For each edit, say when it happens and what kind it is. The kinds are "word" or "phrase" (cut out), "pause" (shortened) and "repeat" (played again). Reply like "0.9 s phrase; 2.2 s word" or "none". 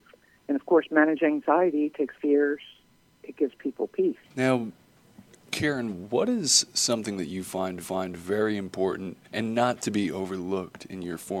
2.1 s word; 4.2 s pause; 7.8 s repeat; 9.2 s pause